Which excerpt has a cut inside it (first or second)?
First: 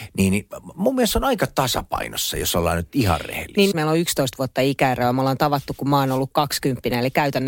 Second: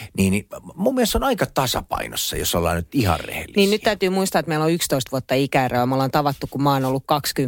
first